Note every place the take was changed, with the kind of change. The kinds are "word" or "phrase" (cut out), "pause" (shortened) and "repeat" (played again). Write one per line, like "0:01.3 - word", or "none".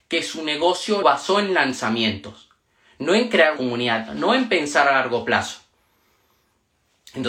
0:01.0 - word
0:03.6 - word